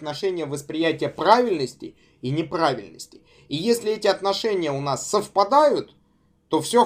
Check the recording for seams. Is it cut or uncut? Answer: uncut